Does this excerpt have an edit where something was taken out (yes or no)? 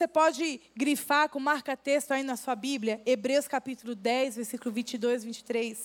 no